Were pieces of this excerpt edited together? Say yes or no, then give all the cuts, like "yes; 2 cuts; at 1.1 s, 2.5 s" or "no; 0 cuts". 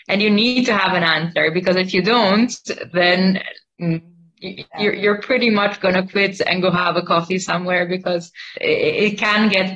no; 0 cuts